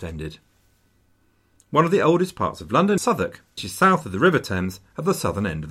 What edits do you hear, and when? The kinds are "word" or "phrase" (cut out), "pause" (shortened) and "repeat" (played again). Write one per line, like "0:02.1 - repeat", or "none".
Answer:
0:03.0 - word
0:03.6 - word